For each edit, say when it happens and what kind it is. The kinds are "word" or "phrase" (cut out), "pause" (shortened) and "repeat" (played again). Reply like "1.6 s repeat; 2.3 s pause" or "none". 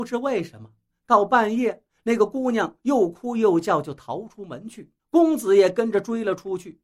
5.0 s pause